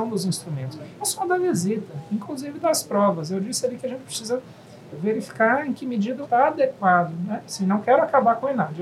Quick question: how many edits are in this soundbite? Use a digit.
3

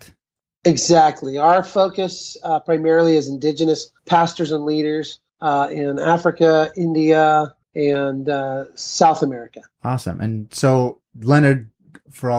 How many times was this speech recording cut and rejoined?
4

